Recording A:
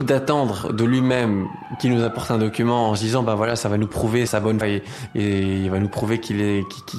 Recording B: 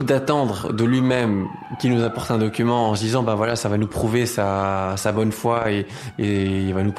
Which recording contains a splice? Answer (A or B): A